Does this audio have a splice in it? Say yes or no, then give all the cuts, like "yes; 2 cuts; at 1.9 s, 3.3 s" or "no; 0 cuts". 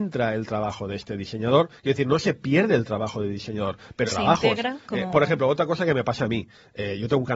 yes; 2 cuts; at 4.1 s, 4.8 s